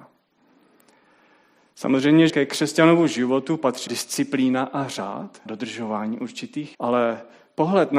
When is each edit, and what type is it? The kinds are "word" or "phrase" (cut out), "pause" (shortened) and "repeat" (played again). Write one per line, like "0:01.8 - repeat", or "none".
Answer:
0:02.3 - word
0:03.9 - word
0:05.5 - word
0:06.7 - word